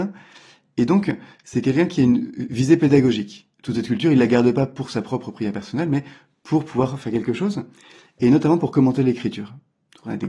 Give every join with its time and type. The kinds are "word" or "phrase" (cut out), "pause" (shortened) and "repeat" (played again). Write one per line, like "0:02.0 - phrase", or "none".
0:03.5 - pause